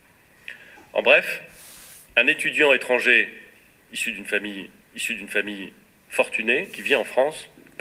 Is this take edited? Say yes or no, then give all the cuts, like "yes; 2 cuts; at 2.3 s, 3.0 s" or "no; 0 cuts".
yes; 1 cut; at 4.8 s